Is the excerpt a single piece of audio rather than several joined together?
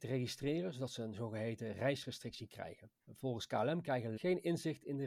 no; 2 cuts; at 3.0 s, 4.2 s

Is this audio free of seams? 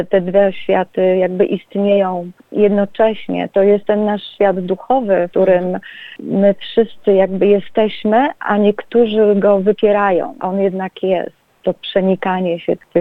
no; 2 cuts; at 5.3 s, 10.4 s

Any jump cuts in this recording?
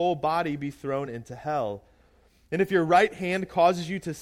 no; 0 cuts

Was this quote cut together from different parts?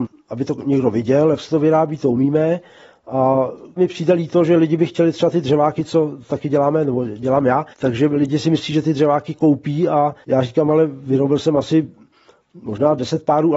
yes; 3 cuts; at 3.8 s, 7.7 s, 10.2 s

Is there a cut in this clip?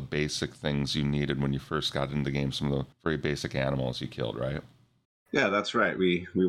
yes; 2 cuts; at 2.9 s, 5.0 s

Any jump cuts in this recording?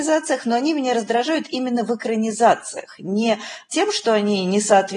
no; 0 cuts

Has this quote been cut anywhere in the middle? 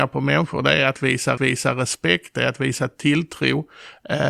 yes; 1 cut; at 1.4 s

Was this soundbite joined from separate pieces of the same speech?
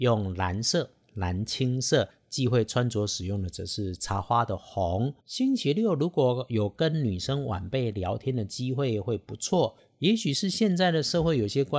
yes; 1 cut; at 5.2 s

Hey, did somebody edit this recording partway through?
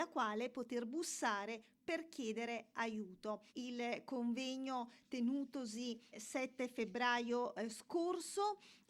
yes; 2 cuts; at 3.5 s, 6.1 s

